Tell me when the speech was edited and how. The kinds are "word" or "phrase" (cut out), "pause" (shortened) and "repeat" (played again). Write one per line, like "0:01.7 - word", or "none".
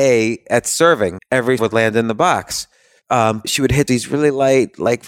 0:01.2 - word
0:01.6 - word
0:03.4 - word
0:03.9 - word